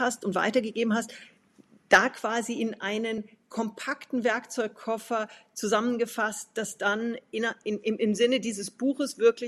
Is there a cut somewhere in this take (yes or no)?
no